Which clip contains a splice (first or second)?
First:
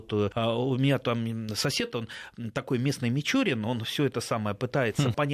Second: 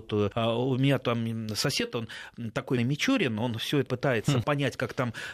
second